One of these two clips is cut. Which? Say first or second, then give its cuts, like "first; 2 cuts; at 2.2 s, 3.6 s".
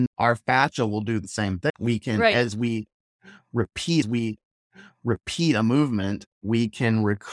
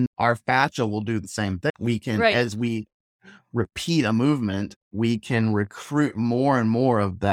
first; 1 cut; at 4.0 s